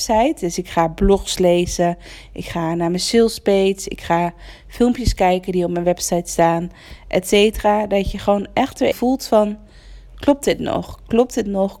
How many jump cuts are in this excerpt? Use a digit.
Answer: 1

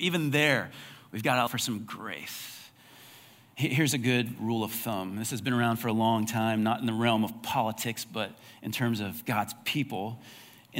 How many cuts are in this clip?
1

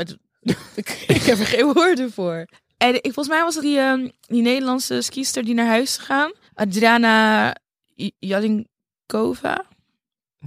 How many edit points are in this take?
4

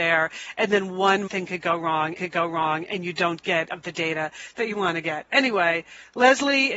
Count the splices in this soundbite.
3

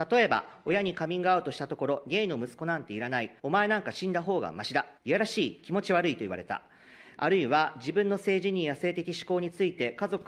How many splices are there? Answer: 2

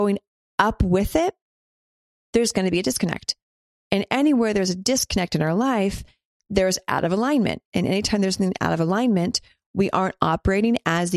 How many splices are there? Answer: 0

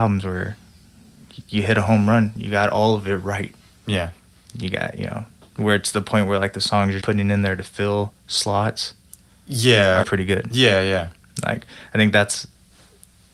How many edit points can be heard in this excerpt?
2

